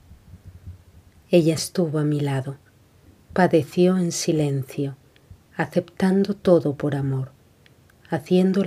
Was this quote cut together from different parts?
yes; 1 cut; at 1.6 s

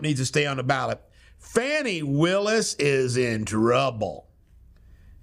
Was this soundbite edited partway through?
no; 0 cuts

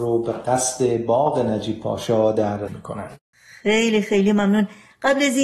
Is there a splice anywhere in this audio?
yes; 1 cut; at 2.7 s

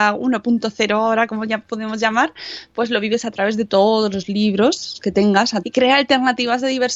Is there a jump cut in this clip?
yes; 1 cut; at 5.6 s

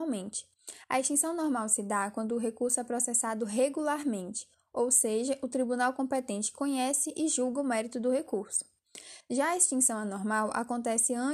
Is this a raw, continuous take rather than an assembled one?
yes; 0 cuts

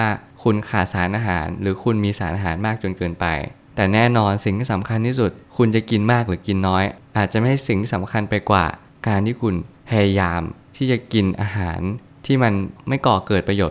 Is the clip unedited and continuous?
yes; 0 cuts

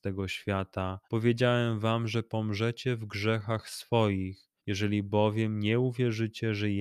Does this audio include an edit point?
yes; 2 cuts; at 1.0 s, 4.6 s

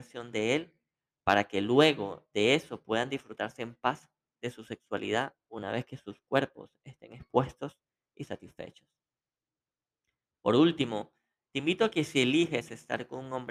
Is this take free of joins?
yes; 0 cuts

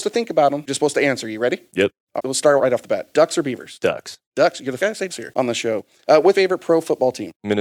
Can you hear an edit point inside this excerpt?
yes; 5 cuts; at 2.2 s, 2.6 s, 4.8 s, 5.1 s, 6.3 s

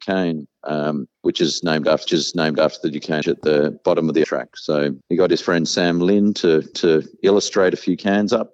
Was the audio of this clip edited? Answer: yes; 6 cuts; at 1.1 s, 2.1 s, 3.2 s, 4.2 s, 5.0 s, 6.7 s

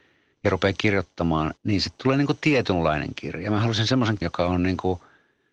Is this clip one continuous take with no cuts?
no; 2 cuts; at 1.6 s, 4.2 s

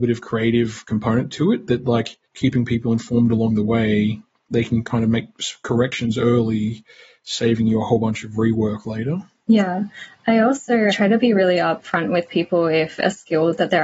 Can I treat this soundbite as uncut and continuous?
no; 2 cuts; at 2.3 s, 10.9 s

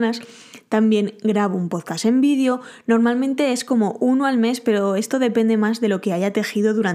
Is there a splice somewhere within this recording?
no; 0 cuts

